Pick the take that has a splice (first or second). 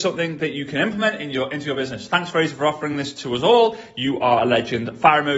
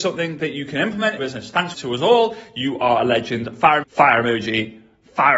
second